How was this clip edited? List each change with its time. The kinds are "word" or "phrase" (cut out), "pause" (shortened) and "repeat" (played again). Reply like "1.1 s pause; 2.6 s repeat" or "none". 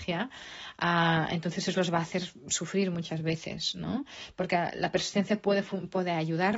none